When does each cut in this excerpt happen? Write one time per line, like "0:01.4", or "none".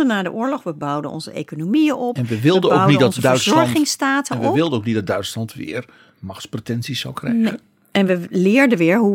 none